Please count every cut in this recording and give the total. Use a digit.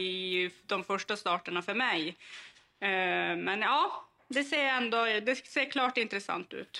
0